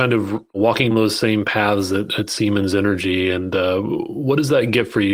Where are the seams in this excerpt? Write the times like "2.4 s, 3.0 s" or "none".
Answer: 0.9 s